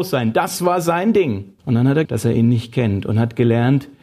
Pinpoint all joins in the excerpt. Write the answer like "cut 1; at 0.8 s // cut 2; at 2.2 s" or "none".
cut 1; at 1.6 s // cut 2; at 2.0 s